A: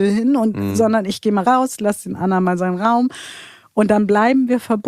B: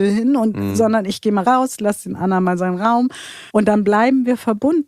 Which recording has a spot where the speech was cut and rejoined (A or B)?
B